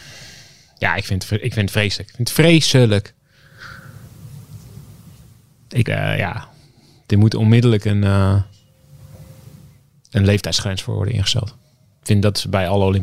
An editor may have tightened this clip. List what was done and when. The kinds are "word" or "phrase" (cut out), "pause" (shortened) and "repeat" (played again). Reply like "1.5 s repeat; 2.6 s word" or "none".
5.8 s word